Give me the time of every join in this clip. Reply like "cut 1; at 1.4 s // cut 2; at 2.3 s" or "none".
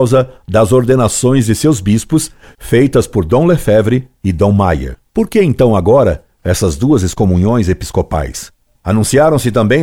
none